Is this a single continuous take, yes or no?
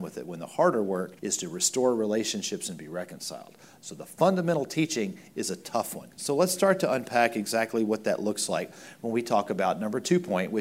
no